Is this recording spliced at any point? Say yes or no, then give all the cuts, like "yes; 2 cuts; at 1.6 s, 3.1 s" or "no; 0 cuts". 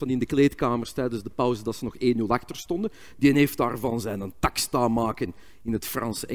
no; 0 cuts